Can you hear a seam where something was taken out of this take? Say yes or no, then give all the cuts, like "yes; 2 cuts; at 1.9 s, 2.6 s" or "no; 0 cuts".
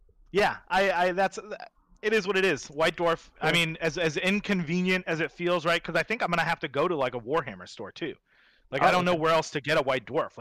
no; 0 cuts